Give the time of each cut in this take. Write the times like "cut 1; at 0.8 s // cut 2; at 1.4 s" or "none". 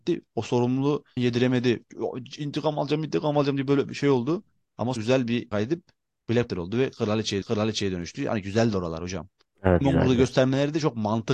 cut 1; at 1.2 s // cut 2; at 5.0 s // cut 3; at 5.5 s // cut 4; at 6.5 s // cut 5; at 7.4 s // cut 6; at 9.8 s